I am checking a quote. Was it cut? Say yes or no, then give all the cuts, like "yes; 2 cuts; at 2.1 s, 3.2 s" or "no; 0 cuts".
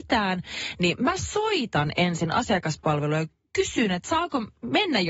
no; 0 cuts